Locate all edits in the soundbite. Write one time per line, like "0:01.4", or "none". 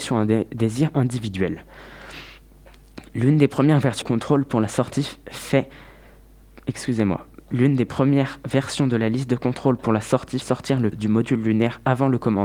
0:04.0
0:06.6
0:10.4
0:10.9